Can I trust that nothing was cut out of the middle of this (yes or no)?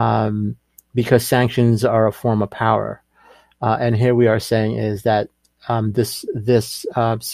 yes